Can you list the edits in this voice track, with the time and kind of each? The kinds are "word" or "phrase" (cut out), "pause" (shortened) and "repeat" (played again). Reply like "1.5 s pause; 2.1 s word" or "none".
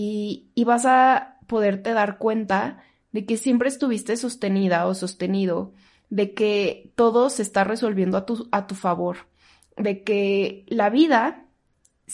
none